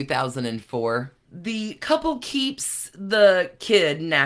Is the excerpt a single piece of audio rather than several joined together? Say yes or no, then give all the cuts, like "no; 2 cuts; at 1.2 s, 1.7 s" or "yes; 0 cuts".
no; 1 cut; at 1.2 s